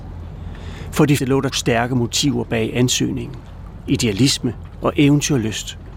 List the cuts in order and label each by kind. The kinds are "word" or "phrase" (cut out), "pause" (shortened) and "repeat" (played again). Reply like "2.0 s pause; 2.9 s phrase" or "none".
1.2 s word; 1.5 s word